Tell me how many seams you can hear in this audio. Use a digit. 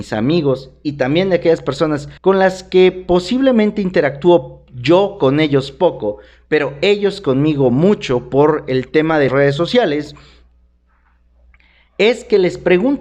2